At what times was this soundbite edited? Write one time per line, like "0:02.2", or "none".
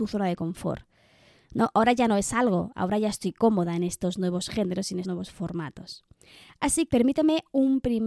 0:05.0
0:06.9